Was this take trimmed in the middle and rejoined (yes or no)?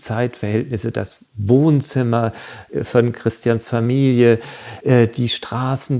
no